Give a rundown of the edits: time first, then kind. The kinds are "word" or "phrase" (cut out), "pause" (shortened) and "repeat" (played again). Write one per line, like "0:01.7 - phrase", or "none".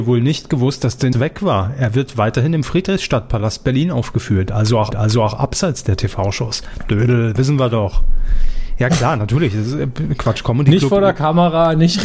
0:01.1 - word
0:04.9 - repeat